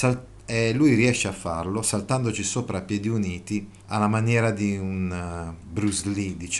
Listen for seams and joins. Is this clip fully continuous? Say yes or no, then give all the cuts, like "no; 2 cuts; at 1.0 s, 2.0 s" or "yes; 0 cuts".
no; 1 cut; at 3.8 s